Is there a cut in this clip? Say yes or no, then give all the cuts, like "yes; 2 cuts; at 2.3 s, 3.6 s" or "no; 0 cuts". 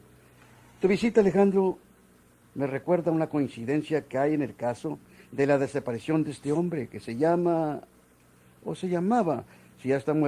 no; 0 cuts